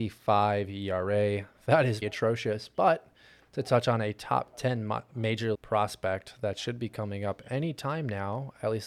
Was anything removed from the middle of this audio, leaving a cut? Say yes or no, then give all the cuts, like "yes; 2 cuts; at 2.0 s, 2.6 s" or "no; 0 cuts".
yes; 2 cuts; at 2.0 s, 5.5 s